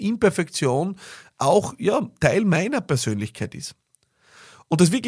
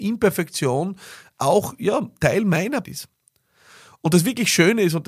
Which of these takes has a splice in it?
second; 1 cut; at 2.8 s

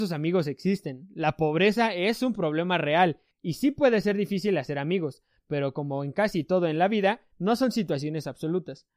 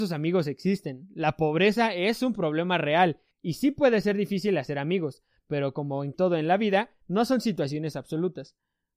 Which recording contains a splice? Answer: second; 1 cut; at 6.1 s

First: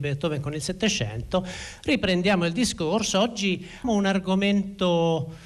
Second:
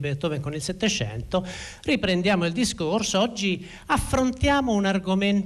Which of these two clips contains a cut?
first; 1 cut; at 3.8 s

